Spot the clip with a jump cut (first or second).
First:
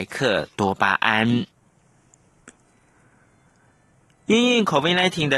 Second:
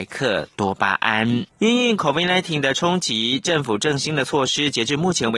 second